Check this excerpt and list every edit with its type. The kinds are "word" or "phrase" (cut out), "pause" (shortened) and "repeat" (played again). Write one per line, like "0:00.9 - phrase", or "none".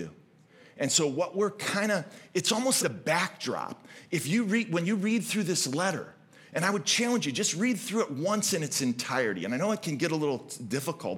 0:02.8 - word